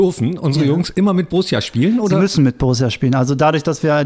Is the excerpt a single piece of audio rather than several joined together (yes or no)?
yes